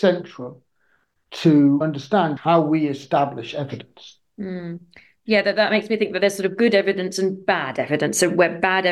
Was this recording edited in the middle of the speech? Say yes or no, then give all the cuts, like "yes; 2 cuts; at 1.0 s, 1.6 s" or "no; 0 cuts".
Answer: no; 0 cuts